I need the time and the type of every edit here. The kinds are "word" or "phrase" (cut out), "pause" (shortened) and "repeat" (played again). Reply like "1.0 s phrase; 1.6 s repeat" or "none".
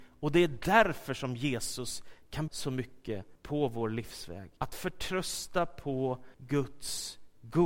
2.5 s word; 3.4 s pause; 4.6 s pause; 6.3 s pause